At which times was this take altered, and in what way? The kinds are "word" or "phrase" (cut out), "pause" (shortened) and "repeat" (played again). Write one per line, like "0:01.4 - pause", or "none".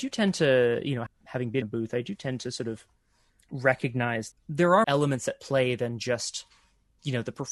0:01.1 - word
0:01.6 - word
0:04.3 - phrase
0:04.8 - word